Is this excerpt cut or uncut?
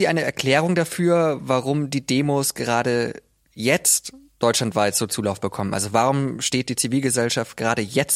uncut